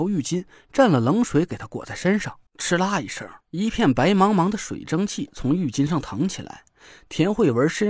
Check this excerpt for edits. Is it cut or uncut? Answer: cut